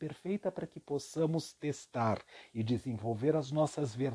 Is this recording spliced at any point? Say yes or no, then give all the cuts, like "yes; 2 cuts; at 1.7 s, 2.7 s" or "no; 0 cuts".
no; 0 cuts